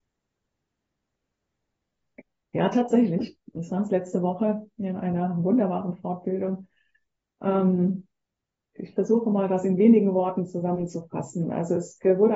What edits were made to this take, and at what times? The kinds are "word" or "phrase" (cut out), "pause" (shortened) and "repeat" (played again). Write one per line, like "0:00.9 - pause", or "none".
0:08.2 - pause